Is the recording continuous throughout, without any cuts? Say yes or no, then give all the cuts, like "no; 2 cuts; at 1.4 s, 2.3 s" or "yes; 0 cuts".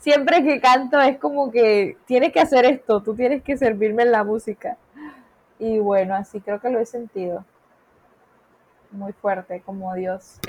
no; 1 cut; at 2.0 s